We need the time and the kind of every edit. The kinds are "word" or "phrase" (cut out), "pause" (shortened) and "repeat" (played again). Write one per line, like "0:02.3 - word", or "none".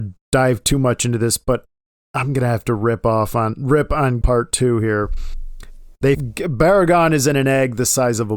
0:04.2 - word
0:06.1 - word